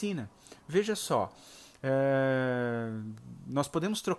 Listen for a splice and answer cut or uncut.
uncut